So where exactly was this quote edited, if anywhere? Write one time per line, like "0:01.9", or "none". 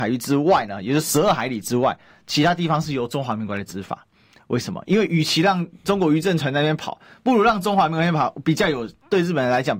none